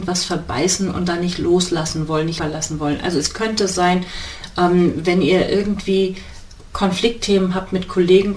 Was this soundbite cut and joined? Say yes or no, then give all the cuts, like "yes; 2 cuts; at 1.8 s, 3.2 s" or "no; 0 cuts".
yes; 1 cut; at 2.4 s